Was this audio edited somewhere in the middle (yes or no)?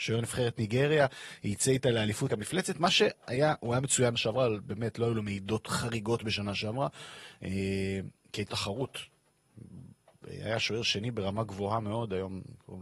yes